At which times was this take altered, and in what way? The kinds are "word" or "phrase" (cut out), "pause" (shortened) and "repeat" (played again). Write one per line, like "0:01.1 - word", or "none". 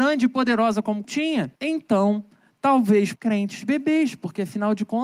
0:01.0 - word
0:01.6 - pause
0:03.2 - phrase